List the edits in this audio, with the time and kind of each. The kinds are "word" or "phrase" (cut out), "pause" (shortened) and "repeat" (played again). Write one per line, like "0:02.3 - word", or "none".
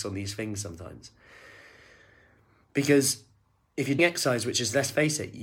0:04.0 - word